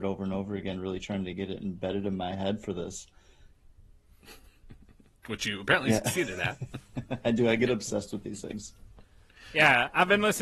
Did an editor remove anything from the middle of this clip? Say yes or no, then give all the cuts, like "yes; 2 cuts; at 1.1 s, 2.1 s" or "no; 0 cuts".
no; 0 cuts